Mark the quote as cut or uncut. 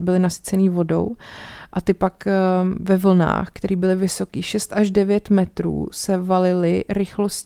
uncut